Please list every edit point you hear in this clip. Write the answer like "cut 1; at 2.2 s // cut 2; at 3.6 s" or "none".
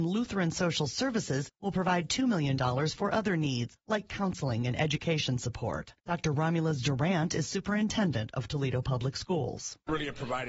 cut 1; at 6.0 s